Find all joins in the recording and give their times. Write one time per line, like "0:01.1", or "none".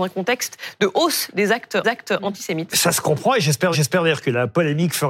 0:01.8
0:03.7